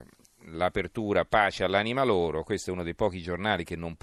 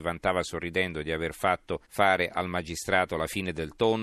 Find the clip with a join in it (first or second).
second